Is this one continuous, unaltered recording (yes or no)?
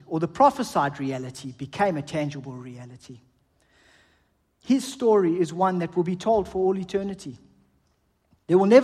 yes